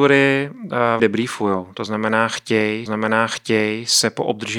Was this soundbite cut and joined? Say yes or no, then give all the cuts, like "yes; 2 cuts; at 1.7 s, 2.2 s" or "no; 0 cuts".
yes; 2 cuts; at 1.0 s, 2.9 s